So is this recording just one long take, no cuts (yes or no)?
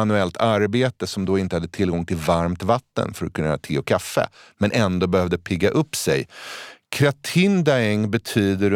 yes